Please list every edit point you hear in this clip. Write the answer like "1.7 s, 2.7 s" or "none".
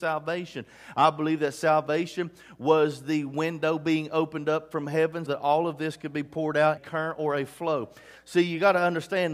5.3 s, 6.8 s